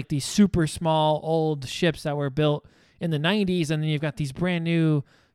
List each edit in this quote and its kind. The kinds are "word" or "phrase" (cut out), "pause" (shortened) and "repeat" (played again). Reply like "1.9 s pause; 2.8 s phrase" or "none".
none